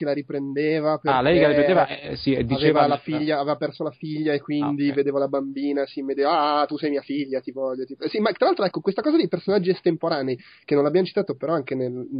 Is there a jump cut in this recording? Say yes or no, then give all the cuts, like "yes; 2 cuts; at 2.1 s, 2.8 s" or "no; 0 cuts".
no; 0 cuts